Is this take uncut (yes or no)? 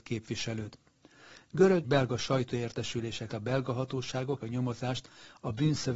no